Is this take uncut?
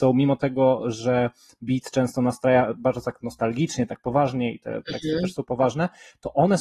yes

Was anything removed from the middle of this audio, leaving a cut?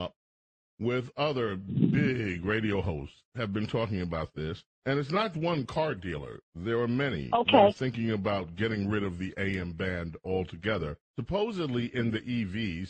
yes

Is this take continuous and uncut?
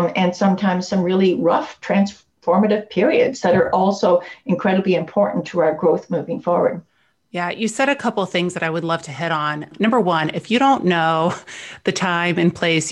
yes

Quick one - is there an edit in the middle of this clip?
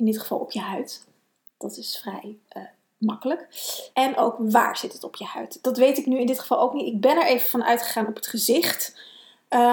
yes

